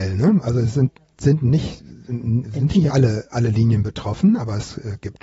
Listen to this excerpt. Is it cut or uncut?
uncut